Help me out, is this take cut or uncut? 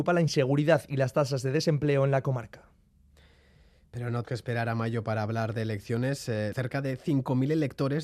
cut